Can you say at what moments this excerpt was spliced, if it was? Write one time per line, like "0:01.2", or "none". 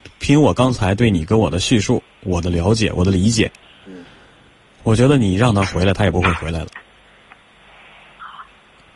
0:03.6

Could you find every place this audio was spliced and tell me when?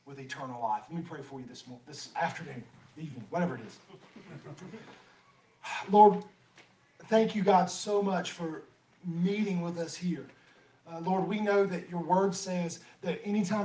none

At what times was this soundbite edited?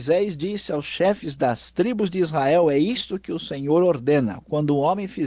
none

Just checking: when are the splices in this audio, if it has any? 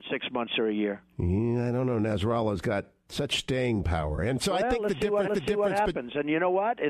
0:01.1
0:05.3

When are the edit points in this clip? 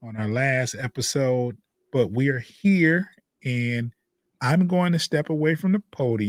none

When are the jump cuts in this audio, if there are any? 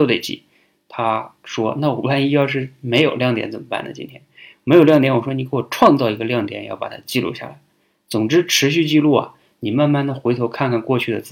none

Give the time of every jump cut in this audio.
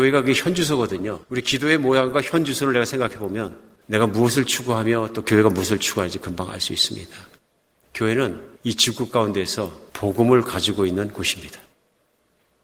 0:01.2
0:03.8
0:08.6
0:09.9

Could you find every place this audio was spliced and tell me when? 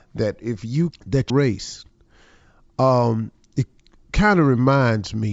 0:00.9
0:01.3

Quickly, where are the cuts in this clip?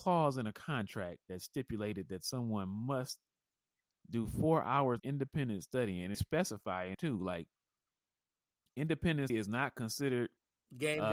0:05.0
0:06.1
0:06.9
0:09.3

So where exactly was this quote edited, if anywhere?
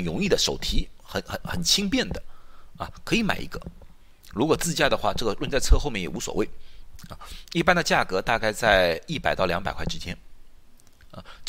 0:04.2

